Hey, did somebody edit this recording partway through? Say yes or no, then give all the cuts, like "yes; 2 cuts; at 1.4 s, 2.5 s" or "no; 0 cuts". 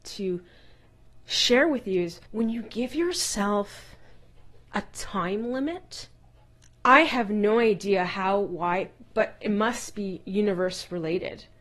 yes; 2 cuts; at 2.3 s, 6.5 s